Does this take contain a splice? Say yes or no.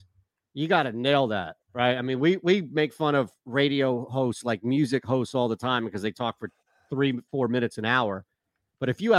no